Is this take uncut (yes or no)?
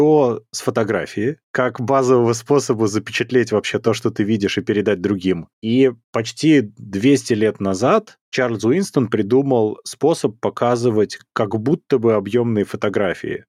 yes